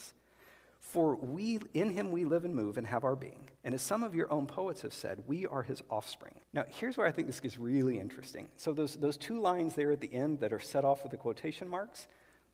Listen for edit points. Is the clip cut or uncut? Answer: cut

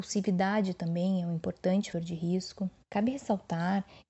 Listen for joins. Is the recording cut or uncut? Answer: cut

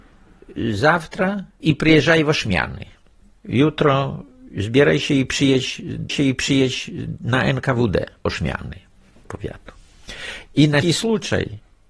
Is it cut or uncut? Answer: cut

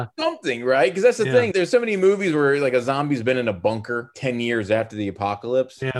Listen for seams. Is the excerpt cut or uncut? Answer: cut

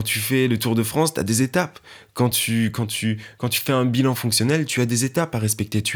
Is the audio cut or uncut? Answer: uncut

